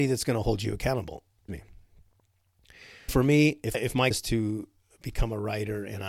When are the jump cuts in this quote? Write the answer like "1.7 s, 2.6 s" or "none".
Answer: 1.5 s, 3.1 s, 3.7 s, 4.1 s